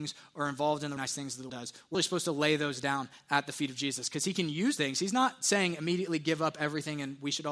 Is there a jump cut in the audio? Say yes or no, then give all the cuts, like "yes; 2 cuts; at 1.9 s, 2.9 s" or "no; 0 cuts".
yes; 4 cuts; at 1.0 s, 1.5 s, 1.9 s, 4.8 s